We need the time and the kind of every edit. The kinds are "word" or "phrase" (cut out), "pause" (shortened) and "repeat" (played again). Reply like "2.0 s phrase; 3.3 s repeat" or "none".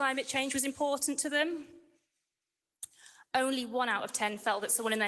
none